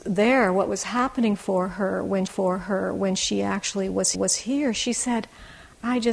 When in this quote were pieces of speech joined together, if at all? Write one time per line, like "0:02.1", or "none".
0:02.3
0:04.1